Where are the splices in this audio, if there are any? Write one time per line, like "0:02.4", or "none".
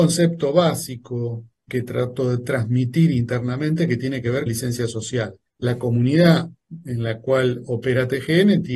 0:01.7
0:04.5
0:05.4